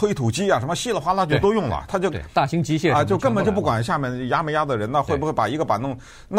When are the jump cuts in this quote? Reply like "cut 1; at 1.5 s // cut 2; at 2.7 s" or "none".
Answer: cut 1; at 1.9 s

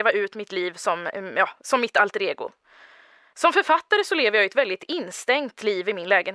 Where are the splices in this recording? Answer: none

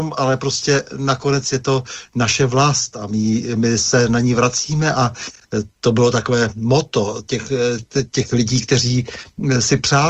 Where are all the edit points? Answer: none

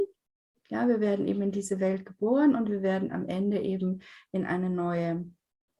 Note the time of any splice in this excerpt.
none

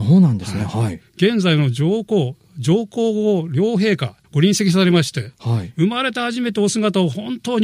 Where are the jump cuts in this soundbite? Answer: cut 1; at 4.2 s

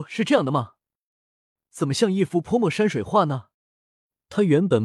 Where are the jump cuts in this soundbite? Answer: cut 1; at 3.5 s

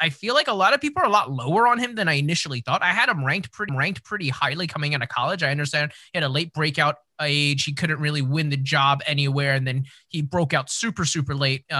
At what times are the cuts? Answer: cut 1; at 3.7 s

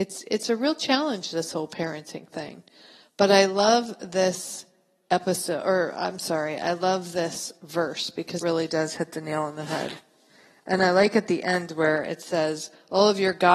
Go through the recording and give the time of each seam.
cut 1; at 8.4 s

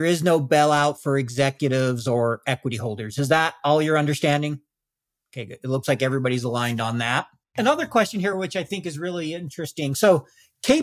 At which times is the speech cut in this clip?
none

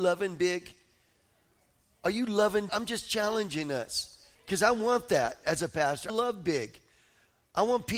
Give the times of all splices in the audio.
cut 1; at 2.7 s // cut 2; at 4.3 s // cut 3; at 6.1 s

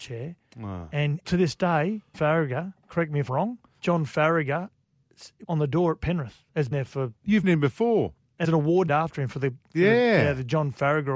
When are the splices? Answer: cut 1; at 1.2 s // cut 2; at 2.1 s // cut 3; at 3.3 s // cut 4; at 3.8 s // cut 5; at 5.4 s // cut 6; at 6.7 s // cut 7; at 7.4 s // cut 8; at 8.4 s // cut 9; at 8.9 s

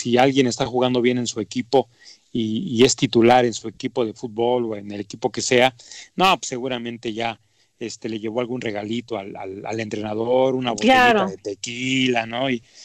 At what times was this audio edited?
none

